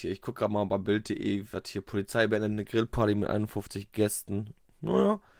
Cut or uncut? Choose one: uncut